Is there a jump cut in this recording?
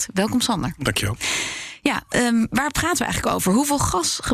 no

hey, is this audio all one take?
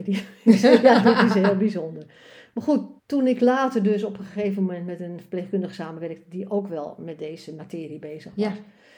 no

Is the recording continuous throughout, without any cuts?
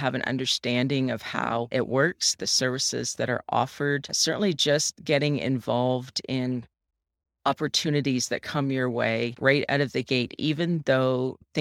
yes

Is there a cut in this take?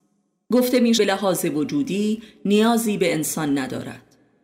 yes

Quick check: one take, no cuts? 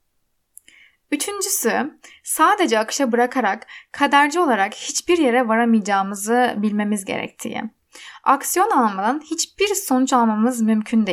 yes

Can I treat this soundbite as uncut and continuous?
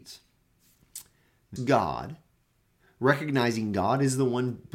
no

